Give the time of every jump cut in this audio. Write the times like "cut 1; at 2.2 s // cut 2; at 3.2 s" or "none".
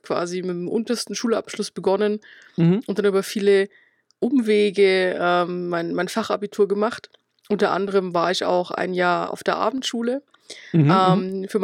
none